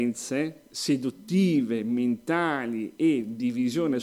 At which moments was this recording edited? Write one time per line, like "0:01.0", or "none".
none